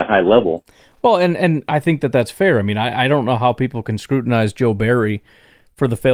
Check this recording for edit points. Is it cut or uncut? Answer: uncut